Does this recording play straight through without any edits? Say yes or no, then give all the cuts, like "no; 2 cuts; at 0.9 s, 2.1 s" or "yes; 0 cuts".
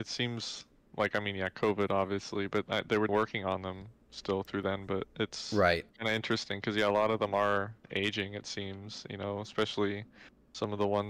no; 3 cuts; at 3.1 s, 5.9 s, 7.8 s